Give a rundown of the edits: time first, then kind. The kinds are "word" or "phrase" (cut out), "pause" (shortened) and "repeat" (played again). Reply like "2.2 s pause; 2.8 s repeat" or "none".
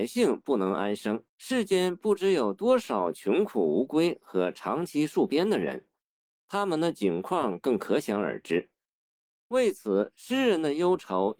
1.3 s pause